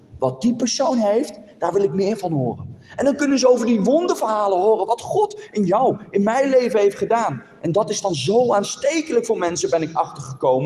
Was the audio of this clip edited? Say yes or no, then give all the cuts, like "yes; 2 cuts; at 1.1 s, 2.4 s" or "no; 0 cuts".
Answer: no; 0 cuts